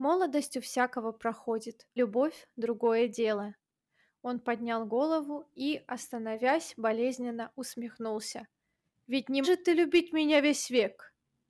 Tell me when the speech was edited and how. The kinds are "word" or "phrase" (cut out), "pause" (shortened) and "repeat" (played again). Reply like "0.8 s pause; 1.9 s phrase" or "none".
2.0 s word; 9.4 s word